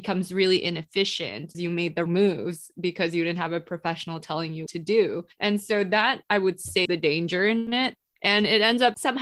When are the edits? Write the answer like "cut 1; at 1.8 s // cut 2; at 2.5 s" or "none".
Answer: cut 1; at 1.5 s // cut 2; at 2.1 s // cut 3; at 4.7 s // cut 4; at 5.3 s // cut 5; at 6.8 s